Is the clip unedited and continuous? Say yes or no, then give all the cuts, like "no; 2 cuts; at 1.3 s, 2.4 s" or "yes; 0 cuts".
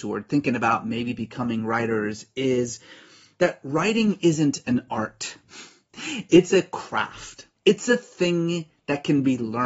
no; 1 cut; at 7.6 s